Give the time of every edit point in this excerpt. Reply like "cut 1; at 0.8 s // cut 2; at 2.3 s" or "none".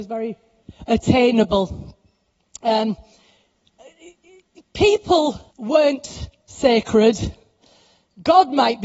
cut 1; at 5.5 s

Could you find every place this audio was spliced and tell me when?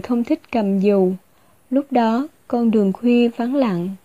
none

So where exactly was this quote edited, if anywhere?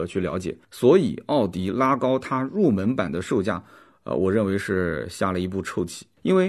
none

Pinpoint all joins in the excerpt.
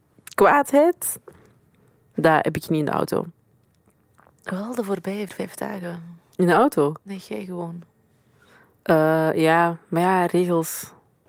cut 1; at 5.3 s

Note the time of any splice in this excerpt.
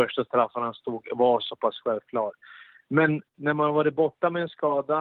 none

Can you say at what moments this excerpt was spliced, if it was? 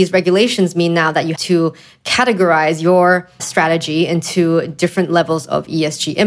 cut 1; at 1.4 s // cut 2; at 3.4 s

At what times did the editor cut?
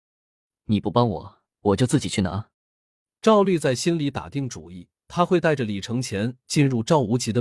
cut 1; at 1.5 s // cut 2; at 2.5 s // cut 3; at 4.9 s

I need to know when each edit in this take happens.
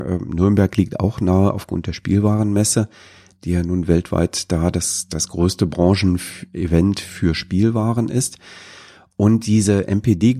none

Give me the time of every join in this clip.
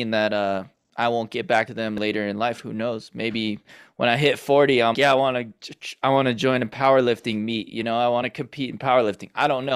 cut 1; at 1.7 s // cut 2; at 4.9 s // cut 3; at 8.2 s

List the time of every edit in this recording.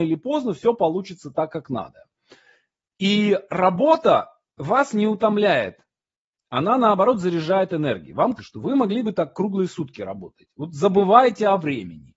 cut 1; at 8.4 s

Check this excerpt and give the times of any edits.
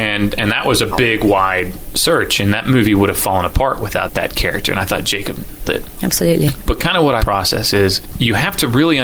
cut 1; at 5.6 s // cut 2; at 7.2 s

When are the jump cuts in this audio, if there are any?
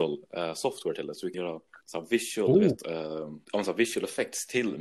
cut 1; at 1.3 s // cut 2; at 1.8 s // cut 3; at 3.4 s

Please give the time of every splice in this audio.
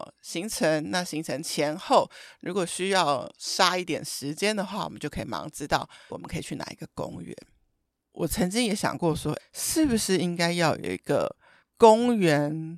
cut 1; at 6.1 s // cut 2; at 9.4 s

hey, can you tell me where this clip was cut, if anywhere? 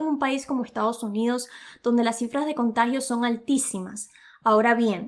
none

